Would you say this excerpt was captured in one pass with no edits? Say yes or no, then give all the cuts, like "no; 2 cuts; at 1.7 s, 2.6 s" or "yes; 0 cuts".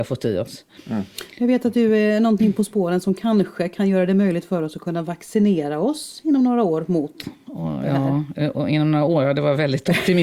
yes; 0 cuts